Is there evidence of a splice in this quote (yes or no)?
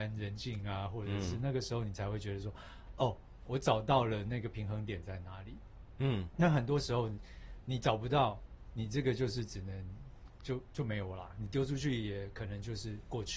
no